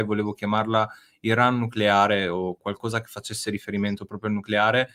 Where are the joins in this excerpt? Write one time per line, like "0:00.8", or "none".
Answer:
none